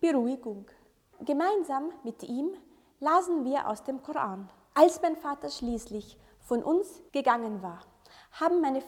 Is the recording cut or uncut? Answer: uncut